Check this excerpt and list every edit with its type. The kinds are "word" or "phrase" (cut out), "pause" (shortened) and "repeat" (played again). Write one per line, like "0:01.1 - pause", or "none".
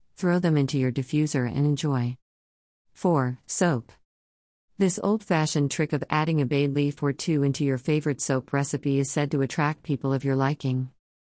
none